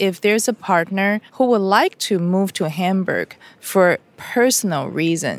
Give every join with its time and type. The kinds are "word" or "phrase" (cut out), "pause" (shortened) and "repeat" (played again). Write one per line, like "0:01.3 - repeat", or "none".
0:01.3 - pause